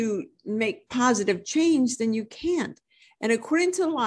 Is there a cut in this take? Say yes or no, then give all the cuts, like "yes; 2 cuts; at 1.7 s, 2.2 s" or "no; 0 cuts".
no; 0 cuts